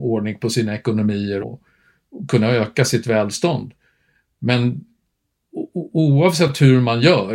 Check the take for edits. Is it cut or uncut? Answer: cut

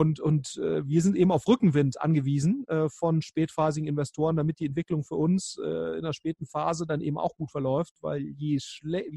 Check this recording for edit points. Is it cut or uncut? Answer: uncut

